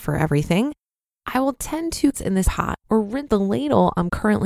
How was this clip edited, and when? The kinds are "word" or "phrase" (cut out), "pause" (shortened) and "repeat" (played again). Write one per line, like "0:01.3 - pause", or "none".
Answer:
0:02.1 - phrase
0:02.4 - word
0:02.8 - pause
0:03.3 - word